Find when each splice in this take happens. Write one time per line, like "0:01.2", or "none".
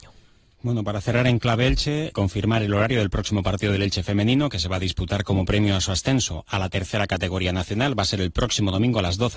0:02.1